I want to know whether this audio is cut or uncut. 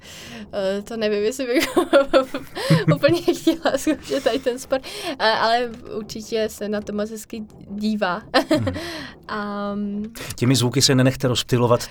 uncut